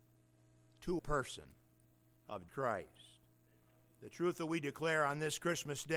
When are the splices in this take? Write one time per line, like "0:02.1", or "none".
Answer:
0:01.0
0:02.5